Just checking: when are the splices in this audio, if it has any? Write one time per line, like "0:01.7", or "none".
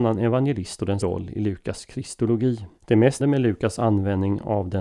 0:01.0
0:02.8
0:03.2